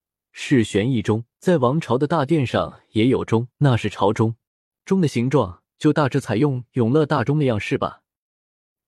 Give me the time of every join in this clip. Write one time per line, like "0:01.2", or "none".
0:01.3
0:03.5
0:04.5
0:05.7

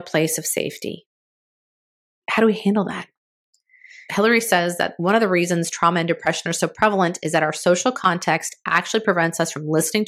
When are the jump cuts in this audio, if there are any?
none

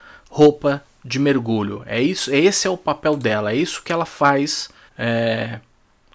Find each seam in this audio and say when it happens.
0:04.9

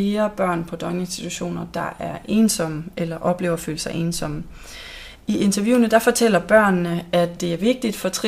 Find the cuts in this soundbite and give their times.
none

